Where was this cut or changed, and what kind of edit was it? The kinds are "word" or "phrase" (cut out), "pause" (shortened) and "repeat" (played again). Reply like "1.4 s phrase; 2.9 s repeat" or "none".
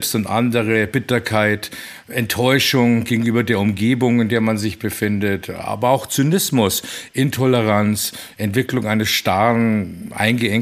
none